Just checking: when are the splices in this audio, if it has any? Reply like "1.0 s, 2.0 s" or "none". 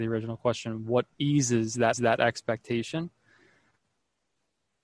1.1 s, 1.9 s